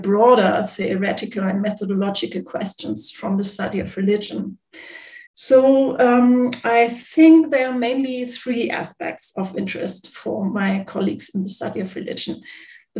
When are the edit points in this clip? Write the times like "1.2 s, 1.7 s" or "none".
5.3 s